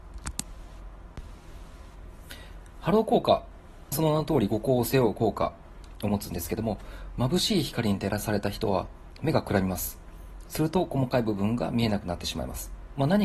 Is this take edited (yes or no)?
yes